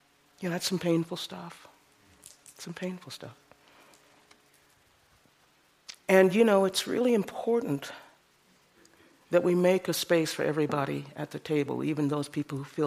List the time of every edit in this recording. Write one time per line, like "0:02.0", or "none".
0:06.0